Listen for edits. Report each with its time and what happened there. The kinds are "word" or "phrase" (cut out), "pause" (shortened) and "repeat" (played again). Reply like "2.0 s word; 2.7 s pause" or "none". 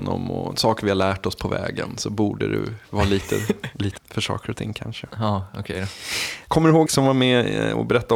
4.0 s phrase; 6.5 s word; 6.9 s word